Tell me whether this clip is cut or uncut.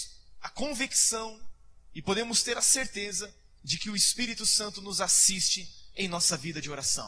uncut